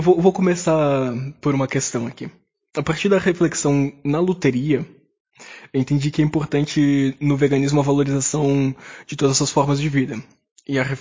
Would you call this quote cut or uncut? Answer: uncut